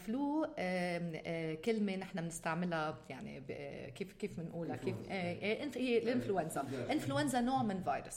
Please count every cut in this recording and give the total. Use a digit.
0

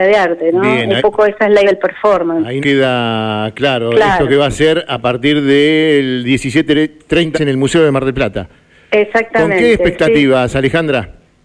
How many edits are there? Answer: 4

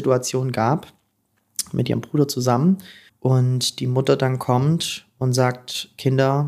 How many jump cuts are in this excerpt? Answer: 1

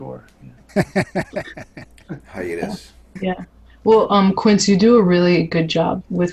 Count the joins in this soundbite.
0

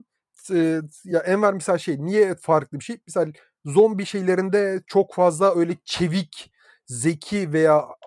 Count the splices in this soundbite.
0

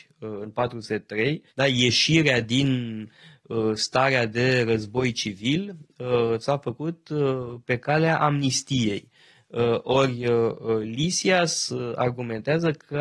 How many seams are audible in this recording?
1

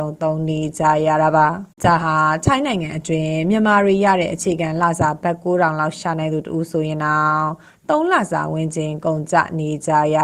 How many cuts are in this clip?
1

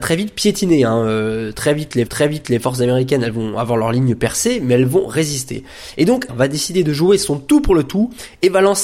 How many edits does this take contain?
2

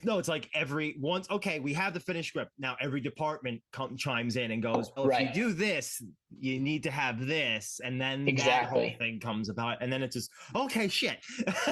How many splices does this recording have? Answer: 1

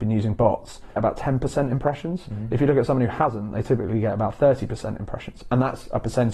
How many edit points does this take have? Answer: 1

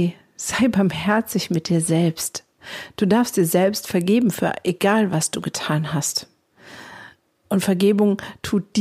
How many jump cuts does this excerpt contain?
1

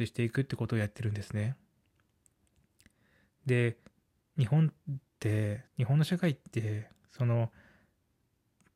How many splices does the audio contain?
2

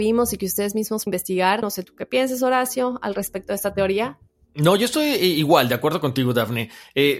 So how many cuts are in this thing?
1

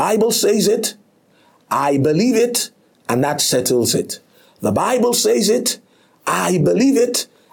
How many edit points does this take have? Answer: 0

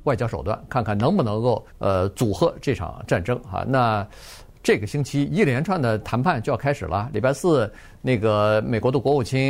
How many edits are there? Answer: 1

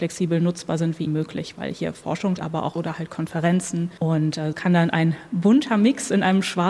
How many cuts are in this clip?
4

